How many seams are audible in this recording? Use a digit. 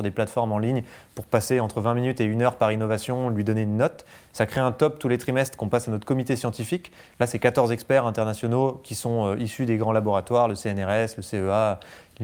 0